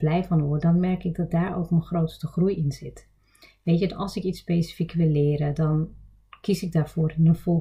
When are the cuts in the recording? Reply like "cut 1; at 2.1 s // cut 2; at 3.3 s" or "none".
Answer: none

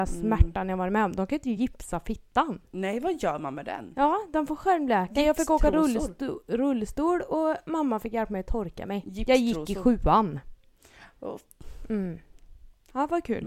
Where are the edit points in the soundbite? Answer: none

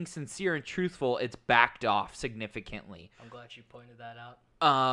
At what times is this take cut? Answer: none

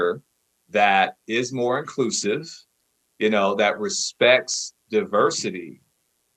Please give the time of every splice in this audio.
none

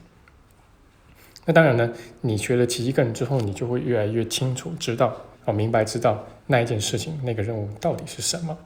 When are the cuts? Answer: cut 1; at 5.3 s // cut 2; at 6.4 s

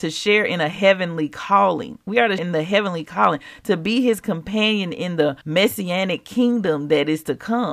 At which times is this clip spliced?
cut 1; at 2.4 s // cut 2; at 5.4 s

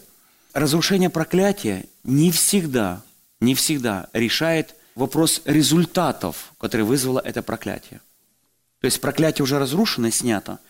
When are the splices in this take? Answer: none

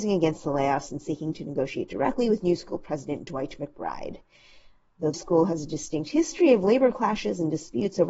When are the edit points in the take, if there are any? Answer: cut 1; at 5.1 s

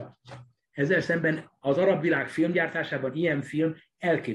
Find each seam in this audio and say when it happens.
none

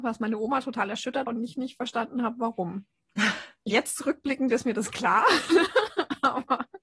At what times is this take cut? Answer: cut 1; at 1.3 s // cut 2; at 3.7 s

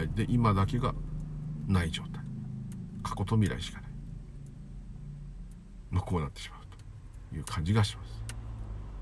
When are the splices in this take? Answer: none

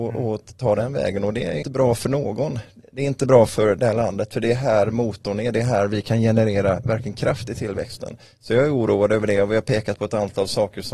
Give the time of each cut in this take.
cut 1; at 1.6 s

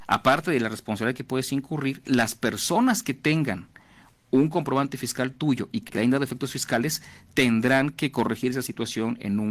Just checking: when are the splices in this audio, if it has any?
cut 1; at 5.9 s

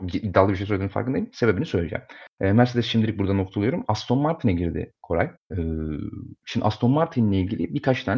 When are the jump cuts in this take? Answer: cut 1; at 2.3 s // cut 2; at 5.4 s

